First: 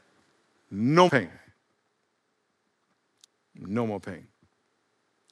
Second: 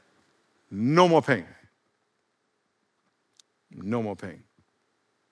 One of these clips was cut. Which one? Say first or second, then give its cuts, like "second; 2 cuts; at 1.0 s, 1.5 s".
first; 1 cut; at 1.1 s